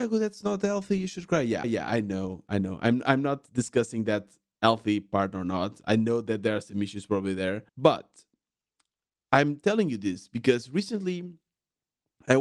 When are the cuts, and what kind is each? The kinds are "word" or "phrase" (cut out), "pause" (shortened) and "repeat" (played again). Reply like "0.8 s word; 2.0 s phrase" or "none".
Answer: 1.6 s repeat; 7.7 s pause